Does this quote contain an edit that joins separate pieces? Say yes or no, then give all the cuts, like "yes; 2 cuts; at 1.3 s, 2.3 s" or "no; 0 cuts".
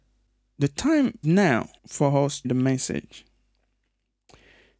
yes; 3 cuts; at 1.2 s, 1.8 s, 2.4 s